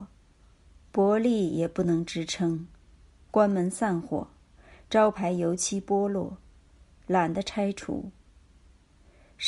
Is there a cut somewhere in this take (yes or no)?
no